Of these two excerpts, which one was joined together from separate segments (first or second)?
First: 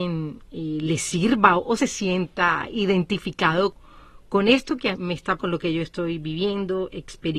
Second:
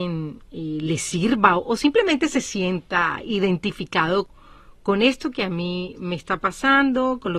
first